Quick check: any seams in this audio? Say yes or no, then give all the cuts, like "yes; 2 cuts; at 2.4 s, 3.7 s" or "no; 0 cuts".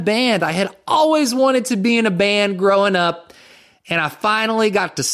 no; 0 cuts